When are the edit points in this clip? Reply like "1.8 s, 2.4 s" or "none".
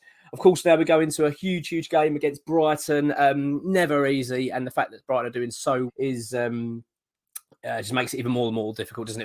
5.9 s